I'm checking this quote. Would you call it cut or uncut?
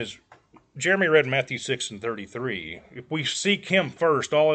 uncut